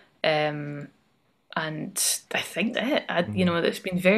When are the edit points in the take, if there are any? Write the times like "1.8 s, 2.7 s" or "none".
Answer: 2.3 s, 2.7 s